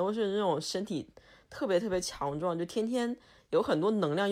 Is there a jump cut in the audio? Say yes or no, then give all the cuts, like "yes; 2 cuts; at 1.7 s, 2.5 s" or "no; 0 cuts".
no; 0 cuts